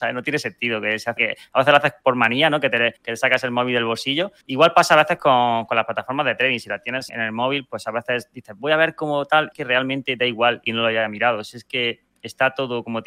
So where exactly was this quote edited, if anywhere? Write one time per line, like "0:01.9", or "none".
0:01.2
0:03.0
0:04.4
0:07.1
0:09.5
0:10.7